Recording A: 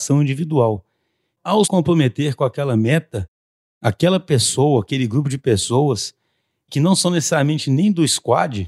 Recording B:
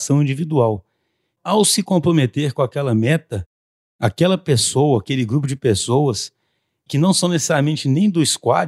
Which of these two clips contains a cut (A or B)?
A